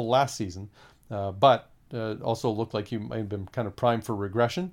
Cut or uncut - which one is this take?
uncut